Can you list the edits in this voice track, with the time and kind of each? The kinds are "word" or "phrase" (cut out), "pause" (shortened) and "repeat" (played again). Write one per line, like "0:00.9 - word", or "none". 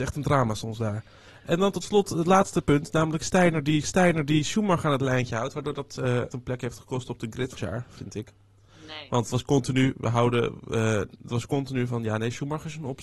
0:03.8 - repeat
0:06.3 - phrase
0:07.6 - word